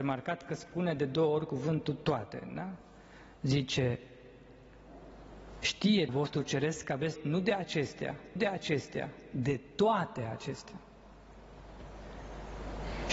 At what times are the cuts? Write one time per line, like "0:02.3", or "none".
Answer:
0:06.1
0:07.1
0:08.4